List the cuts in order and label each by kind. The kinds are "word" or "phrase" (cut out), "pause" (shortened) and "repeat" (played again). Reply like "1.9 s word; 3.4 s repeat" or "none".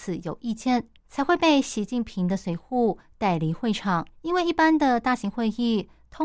1.0 s pause; 4.1 s pause

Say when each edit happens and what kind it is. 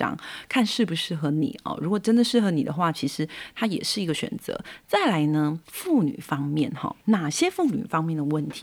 5.6 s pause; 7.0 s pause

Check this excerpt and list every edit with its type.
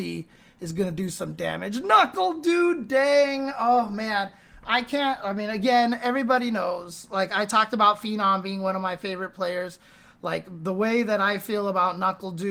none

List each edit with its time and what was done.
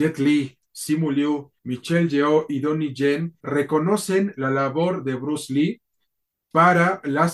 1.6 s pause; 3.4 s pause

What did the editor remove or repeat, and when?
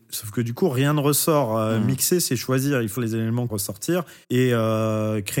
3.0 s word; 3.5 s phrase; 4.2 s pause

